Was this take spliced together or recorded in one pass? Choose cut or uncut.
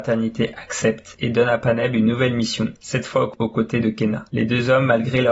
uncut